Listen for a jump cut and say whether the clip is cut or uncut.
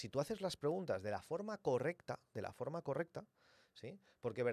uncut